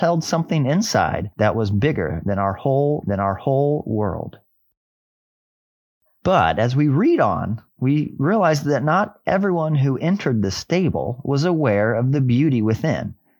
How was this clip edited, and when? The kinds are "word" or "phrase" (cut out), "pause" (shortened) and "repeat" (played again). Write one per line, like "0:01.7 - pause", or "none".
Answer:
0:01.3 - pause
0:03.0 - repeat
0:07.7 - pause